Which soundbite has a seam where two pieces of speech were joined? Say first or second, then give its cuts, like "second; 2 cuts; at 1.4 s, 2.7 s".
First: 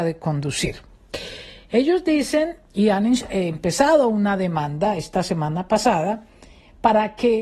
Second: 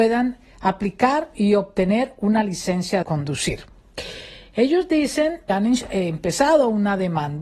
second; 2 cuts; at 3.0 s, 5.5 s